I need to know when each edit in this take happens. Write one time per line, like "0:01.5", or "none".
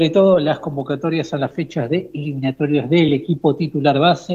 none